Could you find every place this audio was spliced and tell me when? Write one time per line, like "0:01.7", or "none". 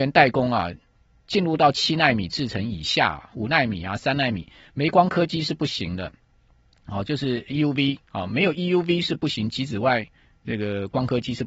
none